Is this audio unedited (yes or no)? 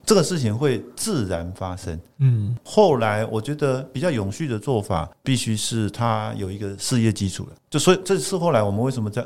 no